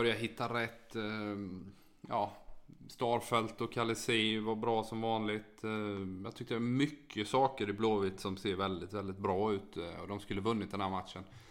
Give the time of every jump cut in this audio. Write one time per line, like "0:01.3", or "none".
none